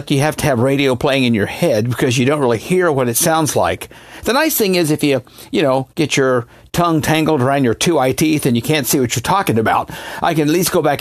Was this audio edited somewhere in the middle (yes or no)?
no